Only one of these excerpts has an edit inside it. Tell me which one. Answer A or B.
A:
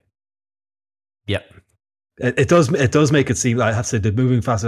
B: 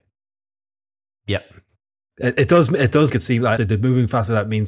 B